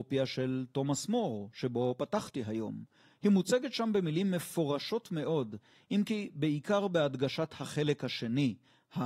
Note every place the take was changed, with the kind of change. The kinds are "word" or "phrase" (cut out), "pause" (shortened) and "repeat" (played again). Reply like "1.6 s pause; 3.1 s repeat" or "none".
none